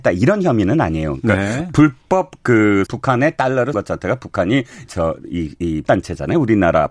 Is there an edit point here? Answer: yes; 4 cuts; at 2.9 s, 3.7 s, 4.9 s, 5.8 s

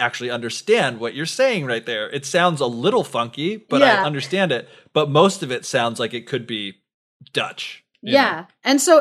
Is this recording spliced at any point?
no; 0 cuts

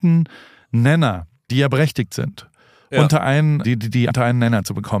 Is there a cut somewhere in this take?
yes; 3 cuts; at 1.5 s, 3.6 s, 4.1 s

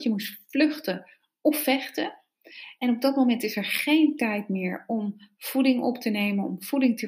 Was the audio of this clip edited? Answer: no; 0 cuts

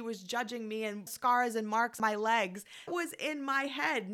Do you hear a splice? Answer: yes; 3 cuts; at 1.1 s, 2.0 s, 2.9 s

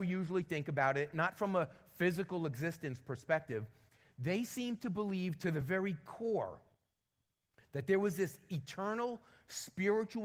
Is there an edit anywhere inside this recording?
no; 0 cuts

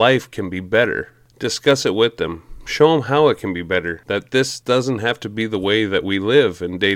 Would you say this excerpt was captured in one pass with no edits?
yes; 0 cuts

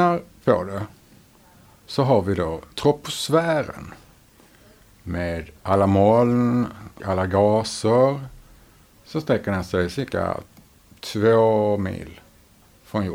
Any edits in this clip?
yes; 3 cuts; at 2.7 s, 5.6 s, 7.0 s

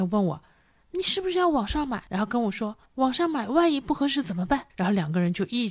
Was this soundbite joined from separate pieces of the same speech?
yes; 3 cuts; at 2.1 s, 2.9 s, 4.7 s

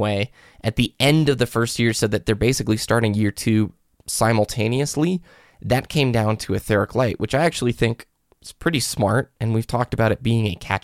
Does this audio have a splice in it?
no; 0 cuts

